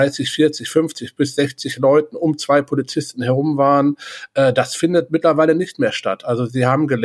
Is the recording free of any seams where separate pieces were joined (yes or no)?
yes